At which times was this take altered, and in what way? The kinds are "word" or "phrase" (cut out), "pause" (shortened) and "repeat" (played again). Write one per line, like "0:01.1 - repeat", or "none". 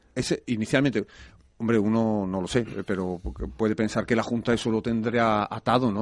none